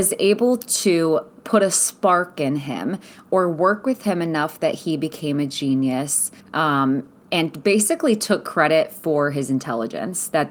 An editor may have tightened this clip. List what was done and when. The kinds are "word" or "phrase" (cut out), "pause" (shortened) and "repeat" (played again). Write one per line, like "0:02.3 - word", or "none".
0:06.4 - pause